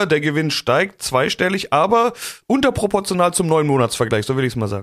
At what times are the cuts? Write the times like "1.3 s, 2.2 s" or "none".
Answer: none